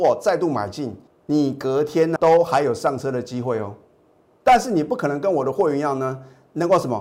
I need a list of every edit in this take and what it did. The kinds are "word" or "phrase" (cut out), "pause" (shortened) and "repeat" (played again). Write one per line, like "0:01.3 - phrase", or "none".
0:01.1 - pause
0:02.2 - word